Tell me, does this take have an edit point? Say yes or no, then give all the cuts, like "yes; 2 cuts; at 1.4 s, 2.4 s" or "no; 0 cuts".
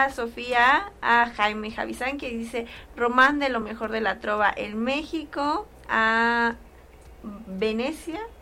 no; 0 cuts